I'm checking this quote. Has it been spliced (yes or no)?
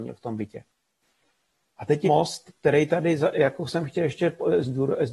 yes